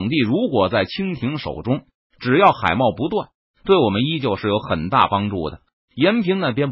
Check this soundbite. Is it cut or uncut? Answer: uncut